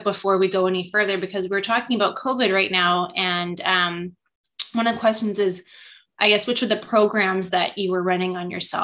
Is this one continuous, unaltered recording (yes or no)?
yes